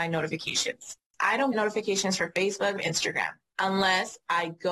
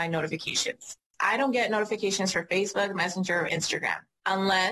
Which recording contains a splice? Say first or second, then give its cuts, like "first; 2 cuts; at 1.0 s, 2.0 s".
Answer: first; 2 cuts; at 1.5 s, 2.8 s